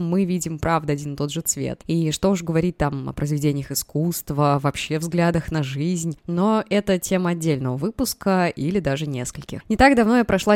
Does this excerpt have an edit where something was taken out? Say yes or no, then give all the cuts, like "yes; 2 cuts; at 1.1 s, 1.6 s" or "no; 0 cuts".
no; 0 cuts